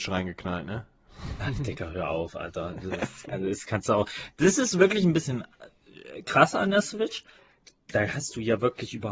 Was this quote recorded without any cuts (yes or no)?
yes